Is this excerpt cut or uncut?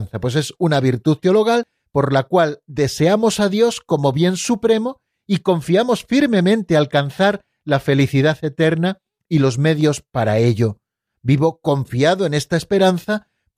uncut